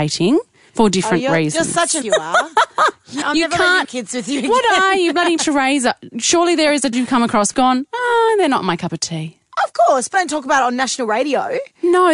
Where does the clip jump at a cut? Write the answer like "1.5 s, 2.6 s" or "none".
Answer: 2.0 s, 3.2 s, 3.8 s, 5.4 s, 6.9 s, 7.5 s, 10.1 s